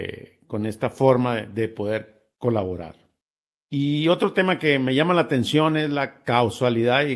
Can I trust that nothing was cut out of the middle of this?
no; 1 cut; at 3.2 s

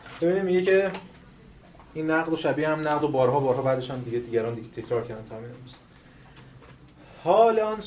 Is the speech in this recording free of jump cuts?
yes; 0 cuts

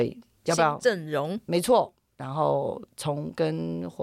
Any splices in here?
no; 0 cuts

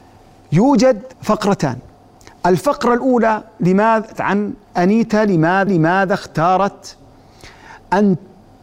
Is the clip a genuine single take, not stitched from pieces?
no; 3 cuts; at 1.1 s, 4.1 s, 5.7 s

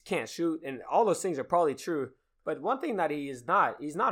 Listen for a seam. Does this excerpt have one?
no; 0 cuts

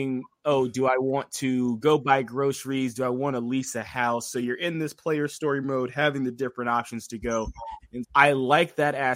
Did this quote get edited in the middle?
yes; 1 cut; at 8.0 s

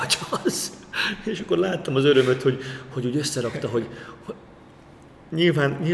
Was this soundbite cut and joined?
no; 0 cuts

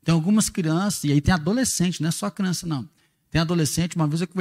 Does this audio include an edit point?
no; 0 cuts

